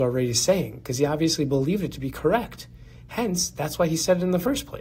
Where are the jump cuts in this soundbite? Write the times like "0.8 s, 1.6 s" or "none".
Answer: none